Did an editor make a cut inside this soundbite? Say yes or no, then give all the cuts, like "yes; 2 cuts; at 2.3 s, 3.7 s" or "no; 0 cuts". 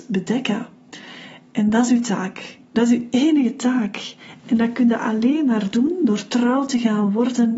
no; 0 cuts